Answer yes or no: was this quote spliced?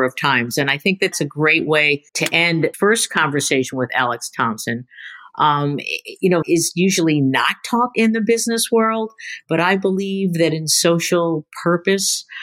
yes